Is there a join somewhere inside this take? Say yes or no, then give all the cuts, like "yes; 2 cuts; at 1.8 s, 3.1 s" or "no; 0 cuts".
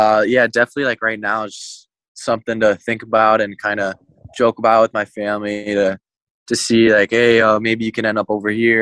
no; 0 cuts